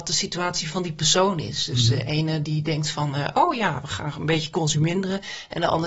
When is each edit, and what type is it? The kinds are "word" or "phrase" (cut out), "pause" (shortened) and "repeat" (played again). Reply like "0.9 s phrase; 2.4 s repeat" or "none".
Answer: none